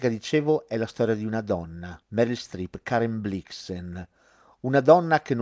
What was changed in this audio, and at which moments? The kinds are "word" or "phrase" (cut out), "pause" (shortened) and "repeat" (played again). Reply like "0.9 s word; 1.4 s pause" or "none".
2.0 s pause